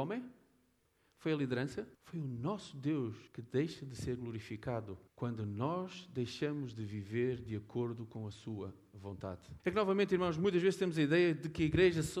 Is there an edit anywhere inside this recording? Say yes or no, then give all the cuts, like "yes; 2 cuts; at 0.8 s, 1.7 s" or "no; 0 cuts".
yes; 4 cuts; at 1.9 s, 3.3 s, 5.1 s, 9.6 s